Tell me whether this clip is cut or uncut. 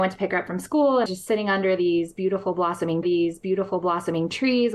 cut